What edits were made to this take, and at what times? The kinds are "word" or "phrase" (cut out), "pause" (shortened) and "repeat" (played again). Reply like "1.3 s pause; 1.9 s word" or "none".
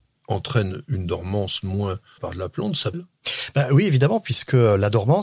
2.2 s phrase; 2.9 s phrase